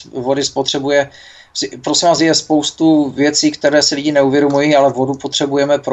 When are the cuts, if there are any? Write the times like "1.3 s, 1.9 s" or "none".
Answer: none